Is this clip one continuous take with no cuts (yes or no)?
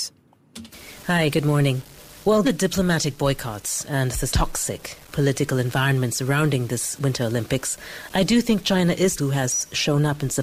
no